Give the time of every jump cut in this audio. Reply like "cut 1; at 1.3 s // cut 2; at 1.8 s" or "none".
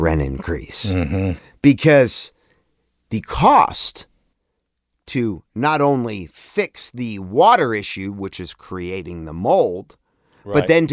none